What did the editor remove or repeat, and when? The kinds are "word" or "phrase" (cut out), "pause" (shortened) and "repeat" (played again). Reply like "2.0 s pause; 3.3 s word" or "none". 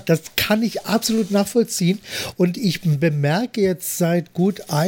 none